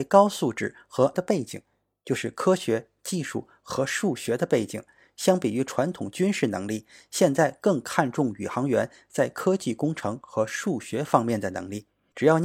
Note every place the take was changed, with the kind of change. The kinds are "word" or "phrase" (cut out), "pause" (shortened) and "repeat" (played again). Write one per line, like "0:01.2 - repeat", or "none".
0:01.1 - word